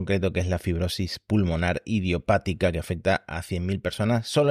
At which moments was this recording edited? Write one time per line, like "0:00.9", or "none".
none